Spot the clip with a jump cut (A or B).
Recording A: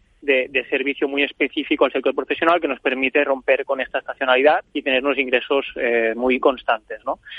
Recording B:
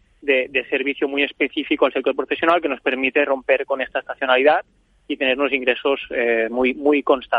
A